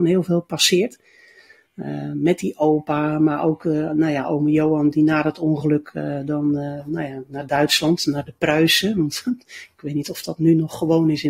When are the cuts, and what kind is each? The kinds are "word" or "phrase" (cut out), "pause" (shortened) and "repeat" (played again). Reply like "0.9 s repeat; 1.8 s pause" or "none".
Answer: none